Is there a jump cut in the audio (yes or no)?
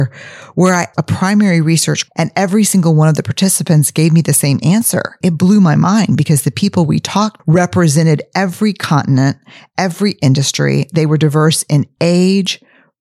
yes